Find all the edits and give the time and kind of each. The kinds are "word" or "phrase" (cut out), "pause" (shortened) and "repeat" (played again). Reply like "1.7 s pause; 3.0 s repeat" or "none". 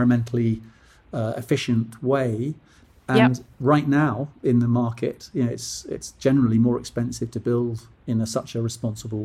none